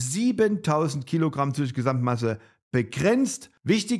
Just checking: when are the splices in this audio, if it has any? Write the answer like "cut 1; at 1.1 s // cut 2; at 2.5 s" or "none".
none